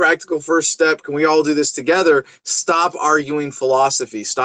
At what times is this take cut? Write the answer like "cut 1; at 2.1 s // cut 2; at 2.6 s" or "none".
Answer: none